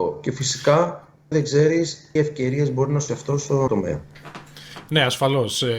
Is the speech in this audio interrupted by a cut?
yes; 4 cuts; at 1.3 s, 2.2 s, 3.1 s, 3.7 s

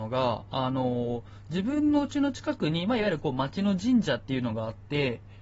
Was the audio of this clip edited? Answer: no; 0 cuts

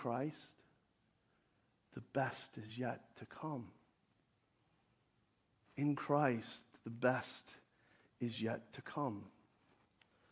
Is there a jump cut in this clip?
no; 0 cuts

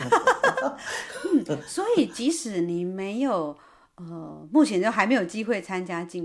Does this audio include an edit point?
no; 0 cuts

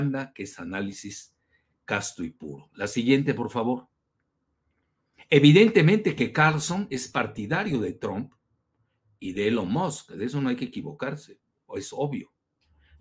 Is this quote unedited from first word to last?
yes; 0 cuts

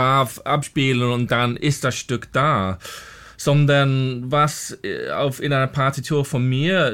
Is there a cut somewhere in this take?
no; 0 cuts

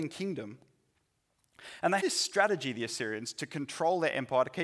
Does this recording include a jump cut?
yes; 1 cut; at 2.0 s

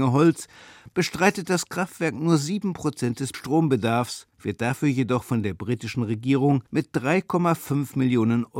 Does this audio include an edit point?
yes; 3 cuts; at 3.3 s, 4.3 s, 6.7 s

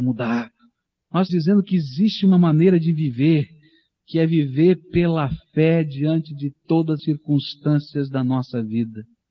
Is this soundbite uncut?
no; 2 cuts; at 1.3 s, 7.0 s

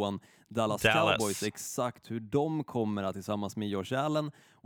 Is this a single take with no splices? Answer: no; 1 cut; at 3.1 s

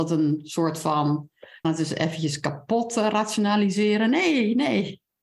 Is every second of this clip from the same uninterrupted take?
no; 1 cut; at 1.6 s

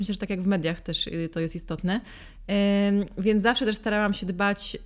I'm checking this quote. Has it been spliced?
no; 0 cuts

